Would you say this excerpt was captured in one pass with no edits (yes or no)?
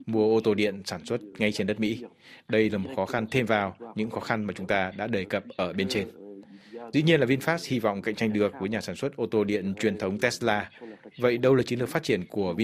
yes